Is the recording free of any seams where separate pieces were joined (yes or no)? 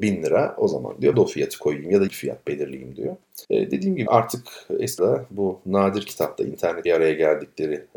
no